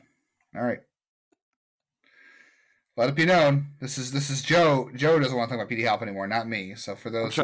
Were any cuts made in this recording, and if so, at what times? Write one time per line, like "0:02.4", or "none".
none